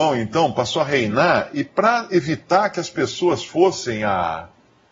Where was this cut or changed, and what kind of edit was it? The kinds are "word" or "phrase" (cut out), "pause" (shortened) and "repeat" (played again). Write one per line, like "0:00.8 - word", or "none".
none